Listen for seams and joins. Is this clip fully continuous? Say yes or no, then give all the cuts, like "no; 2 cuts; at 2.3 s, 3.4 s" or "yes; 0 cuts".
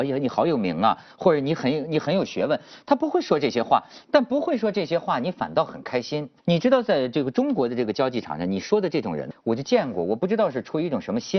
no; 2 cuts; at 6.4 s, 9.3 s